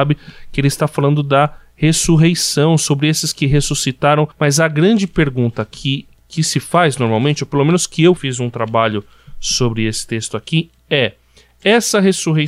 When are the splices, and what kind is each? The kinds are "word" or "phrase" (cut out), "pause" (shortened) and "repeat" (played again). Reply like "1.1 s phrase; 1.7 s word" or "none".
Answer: 4.3 s pause; 8.2 s phrase